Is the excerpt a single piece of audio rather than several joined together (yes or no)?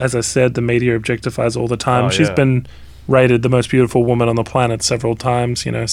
yes